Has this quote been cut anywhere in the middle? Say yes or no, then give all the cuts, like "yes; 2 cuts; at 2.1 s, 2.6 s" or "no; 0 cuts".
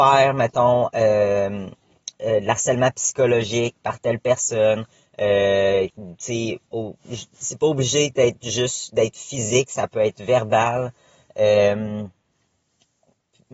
no; 0 cuts